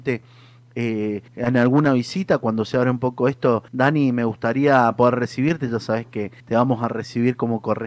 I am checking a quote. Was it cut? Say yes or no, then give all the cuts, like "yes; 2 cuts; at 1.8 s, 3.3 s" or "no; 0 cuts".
yes; 3 cuts; at 1.3 s, 3.7 s, 6.4 s